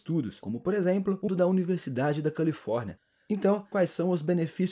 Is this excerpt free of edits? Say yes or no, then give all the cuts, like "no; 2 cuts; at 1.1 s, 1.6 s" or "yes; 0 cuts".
no; 2 cuts; at 1.3 s, 3.7 s